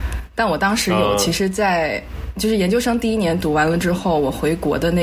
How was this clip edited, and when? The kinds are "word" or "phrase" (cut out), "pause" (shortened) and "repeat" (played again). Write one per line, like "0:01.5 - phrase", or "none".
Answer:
none